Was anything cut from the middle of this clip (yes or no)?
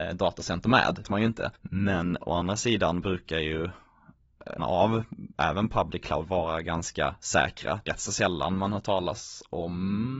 yes